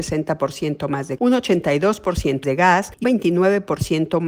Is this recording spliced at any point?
yes; 3 cuts; at 1.2 s, 2.4 s, 3.0 s

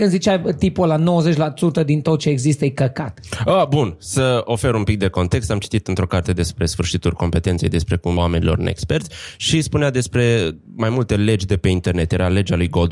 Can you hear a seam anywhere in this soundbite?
yes; 1 cut; at 8.2 s

